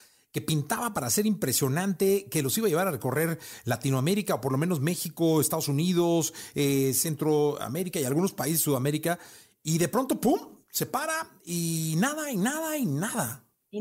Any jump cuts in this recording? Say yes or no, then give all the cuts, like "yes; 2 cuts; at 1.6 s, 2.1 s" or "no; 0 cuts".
no; 0 cuts